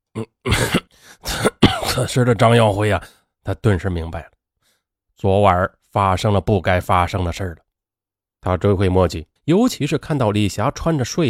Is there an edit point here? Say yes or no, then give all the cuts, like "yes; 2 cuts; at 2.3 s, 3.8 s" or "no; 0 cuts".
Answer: yes; 1 cut; at 9.4 s